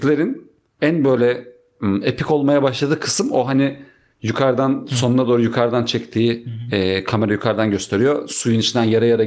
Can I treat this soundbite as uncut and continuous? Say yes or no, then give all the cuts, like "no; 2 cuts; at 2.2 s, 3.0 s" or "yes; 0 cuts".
yes; 0 cuts